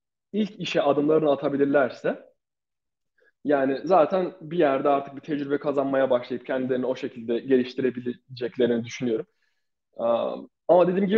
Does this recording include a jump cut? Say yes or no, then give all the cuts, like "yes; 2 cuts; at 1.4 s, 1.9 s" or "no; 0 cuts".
no; 0 cuts